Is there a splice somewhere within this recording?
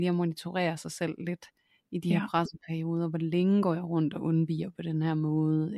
no; 0 cuts

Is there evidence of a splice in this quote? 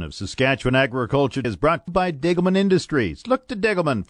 yes; 2 cuts; at 1.4 s, 1.9 s

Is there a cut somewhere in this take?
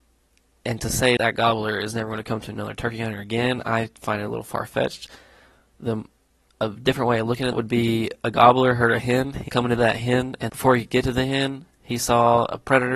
yes; 4 cuts; at 1.2 s, 7.5 s, 9.5 s, 10.5 s

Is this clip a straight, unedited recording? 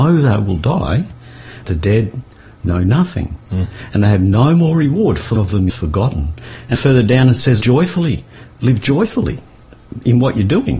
no; 5 cuts; at 1.6 s, 5.4 s, 5.7 s, 6.7 s, 7.6 s

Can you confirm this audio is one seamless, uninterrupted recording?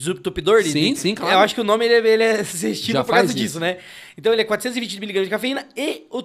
yes; 0 cuts

